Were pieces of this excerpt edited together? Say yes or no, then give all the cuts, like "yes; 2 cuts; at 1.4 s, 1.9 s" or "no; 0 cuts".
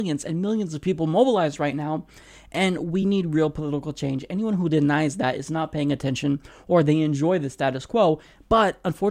no; 0 cuts